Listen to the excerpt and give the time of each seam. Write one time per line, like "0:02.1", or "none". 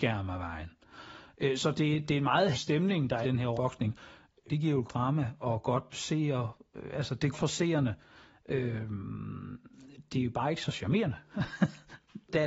0:01.6
0:02.5
0:03.2
0:03.5
0:04.5
0:04.9
0:05.9
0:07.3